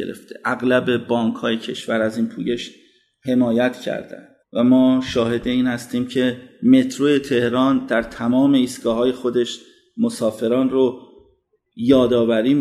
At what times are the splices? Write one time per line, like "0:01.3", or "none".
0:04.4